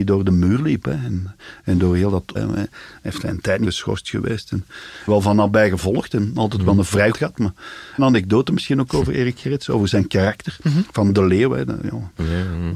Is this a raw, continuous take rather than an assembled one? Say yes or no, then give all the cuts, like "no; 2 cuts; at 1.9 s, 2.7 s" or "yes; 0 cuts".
no; 5 cuts; at 2.4 s, 3.6 s, 5.1 s, 7.1 s, 8.0 s